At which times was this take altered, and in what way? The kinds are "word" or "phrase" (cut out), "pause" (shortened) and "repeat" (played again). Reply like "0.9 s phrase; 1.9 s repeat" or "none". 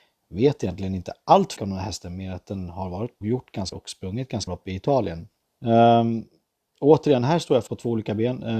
1.6 s word; 3.2 s word; 3.7 s phrase; 4.5 s word; 5.4 s pause; 7.7 s word